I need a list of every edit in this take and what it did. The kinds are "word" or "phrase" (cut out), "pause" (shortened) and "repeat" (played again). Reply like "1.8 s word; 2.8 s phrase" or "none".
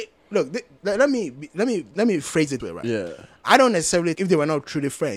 1.9 s word; 2.6 s word; 4.1 s word